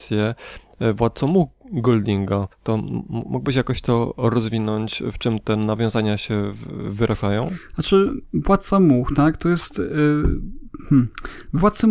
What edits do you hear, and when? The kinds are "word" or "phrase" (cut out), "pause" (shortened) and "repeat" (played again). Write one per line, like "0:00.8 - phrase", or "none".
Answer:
0:02.5 - pause